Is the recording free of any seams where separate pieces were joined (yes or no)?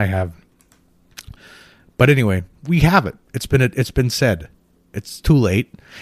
yes